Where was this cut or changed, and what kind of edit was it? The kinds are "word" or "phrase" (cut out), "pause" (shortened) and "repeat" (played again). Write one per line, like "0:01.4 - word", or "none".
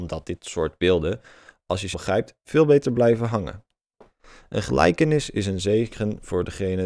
0:01.9 - word